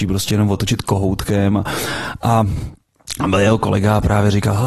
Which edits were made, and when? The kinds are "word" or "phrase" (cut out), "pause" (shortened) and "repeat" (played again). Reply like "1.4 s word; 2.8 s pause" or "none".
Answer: none